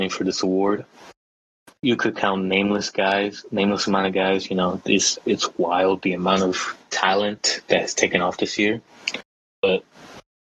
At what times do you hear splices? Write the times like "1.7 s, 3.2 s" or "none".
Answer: none

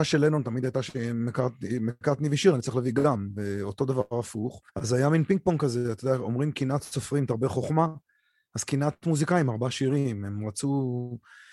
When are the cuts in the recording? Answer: 4.7 s

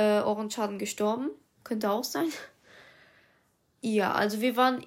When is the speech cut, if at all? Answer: none

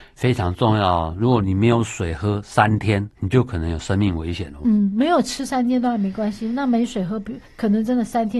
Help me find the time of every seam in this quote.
3.1 s

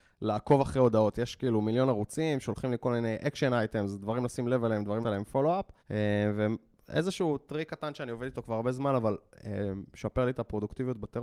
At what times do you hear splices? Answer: 5.0 s, 5.8 s

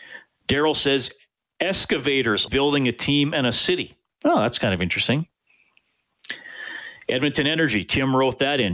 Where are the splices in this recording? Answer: 2.5 s

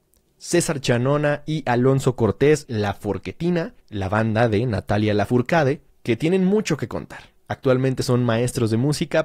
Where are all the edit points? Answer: 2.7 s, 3.8 s, 5.9 s

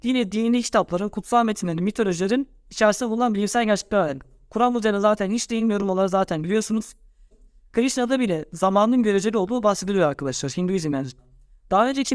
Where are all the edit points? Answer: none

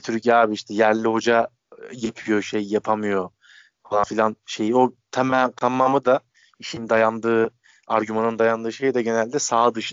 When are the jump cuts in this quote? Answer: 2.4 s

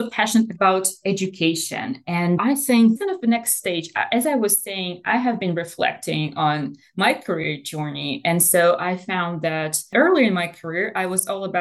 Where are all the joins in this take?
2.4 s, 3.0 s

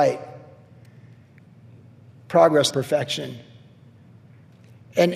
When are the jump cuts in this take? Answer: 2.7 s

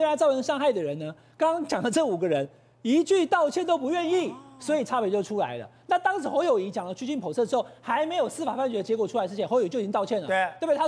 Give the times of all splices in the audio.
none

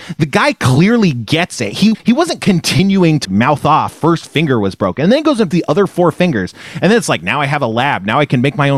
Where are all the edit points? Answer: 1.9 s, 3.2 s, 3.9 s, 5.5 s

